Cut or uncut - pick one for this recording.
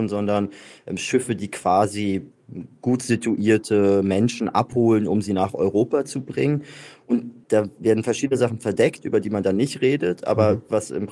uncut